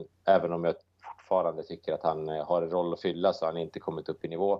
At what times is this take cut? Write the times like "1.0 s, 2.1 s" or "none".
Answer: none